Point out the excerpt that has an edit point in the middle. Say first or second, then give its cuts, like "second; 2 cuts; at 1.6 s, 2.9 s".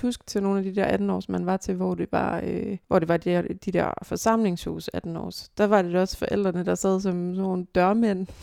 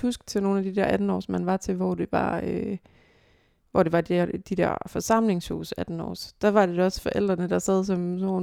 first; 1 cut; at 2.8 s